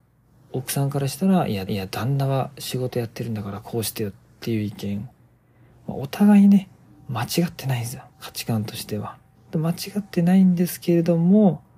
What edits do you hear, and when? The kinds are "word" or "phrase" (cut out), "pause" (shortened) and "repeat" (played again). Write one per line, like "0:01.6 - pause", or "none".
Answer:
0:01.7 - repeat
0:08.1 - pause
0:09.3 - pause

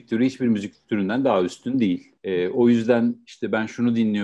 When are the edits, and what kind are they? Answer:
none

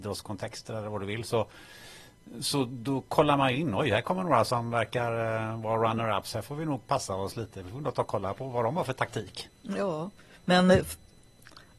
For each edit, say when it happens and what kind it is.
none

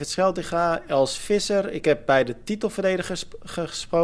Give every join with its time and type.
none

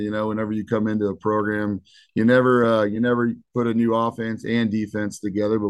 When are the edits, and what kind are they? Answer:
none

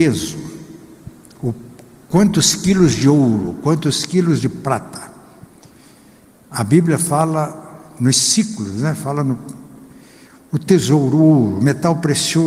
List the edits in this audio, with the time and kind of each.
none

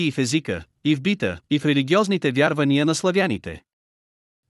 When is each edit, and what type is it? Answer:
0:01.4 - pause

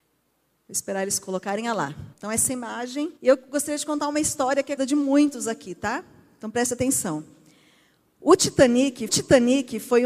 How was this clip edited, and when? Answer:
0:02.1 - pause
0:03.2 - pause
0:04.8 - word
0:09.1 - repeat

